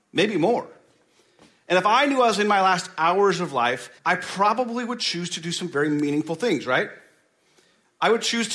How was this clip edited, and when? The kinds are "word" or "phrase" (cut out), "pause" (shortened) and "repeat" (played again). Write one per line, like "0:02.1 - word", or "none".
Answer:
0:04.0 - pause